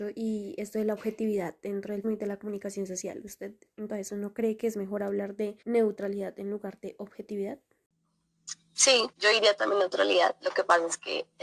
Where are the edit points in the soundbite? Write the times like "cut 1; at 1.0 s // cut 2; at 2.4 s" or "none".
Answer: cut 1; at 2.0 s // cut 2; at 3.9 s // cut 3; at 5.6 s // cut 4; at 9.1 s